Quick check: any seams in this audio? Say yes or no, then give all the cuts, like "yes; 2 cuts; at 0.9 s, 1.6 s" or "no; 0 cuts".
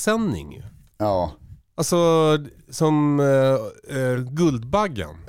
no; 0 cuts